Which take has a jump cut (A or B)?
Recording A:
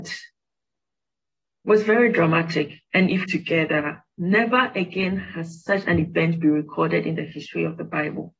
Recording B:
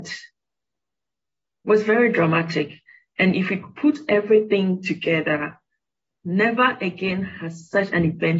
A